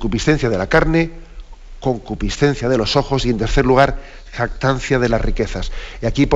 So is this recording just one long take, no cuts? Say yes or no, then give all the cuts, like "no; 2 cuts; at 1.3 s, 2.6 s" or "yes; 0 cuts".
yes; 0 cuts